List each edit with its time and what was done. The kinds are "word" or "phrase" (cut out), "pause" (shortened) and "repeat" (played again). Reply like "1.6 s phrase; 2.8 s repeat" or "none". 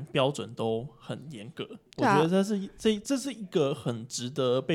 1.9 s pause